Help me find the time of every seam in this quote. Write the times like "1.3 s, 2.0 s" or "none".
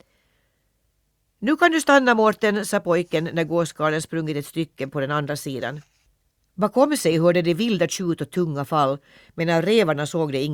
none